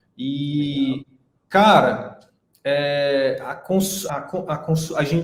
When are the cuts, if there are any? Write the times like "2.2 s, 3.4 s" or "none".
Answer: 4.1 s